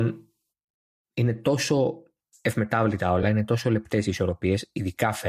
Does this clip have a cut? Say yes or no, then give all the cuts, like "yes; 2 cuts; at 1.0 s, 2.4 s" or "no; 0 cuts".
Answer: no; 0 cuts